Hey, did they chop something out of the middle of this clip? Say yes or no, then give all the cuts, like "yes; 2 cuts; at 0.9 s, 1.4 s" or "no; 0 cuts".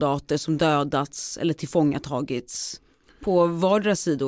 no; 0 cuts